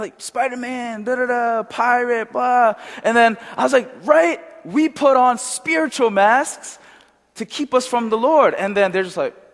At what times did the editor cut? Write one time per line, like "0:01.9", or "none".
none